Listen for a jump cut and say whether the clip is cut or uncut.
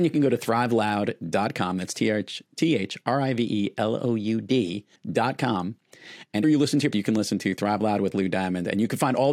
cut